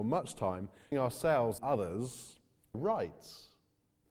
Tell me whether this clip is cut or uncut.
cut